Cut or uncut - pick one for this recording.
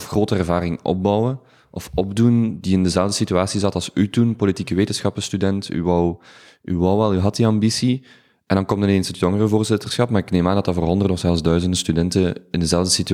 uncut